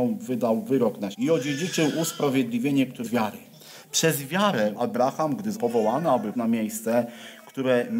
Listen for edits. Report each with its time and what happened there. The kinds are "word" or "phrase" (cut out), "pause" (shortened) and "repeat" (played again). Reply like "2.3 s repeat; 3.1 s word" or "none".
1.1 s word; 3.0 s word; 4.7 s word; 5.5 s word; 6.3 s word